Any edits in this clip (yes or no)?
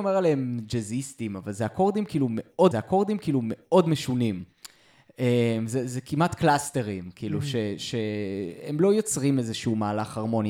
yes